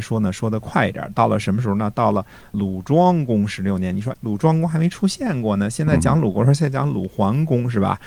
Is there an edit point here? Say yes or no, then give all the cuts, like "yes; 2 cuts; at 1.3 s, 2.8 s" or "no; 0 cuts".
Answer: yes; 1 cut; at 4.1 s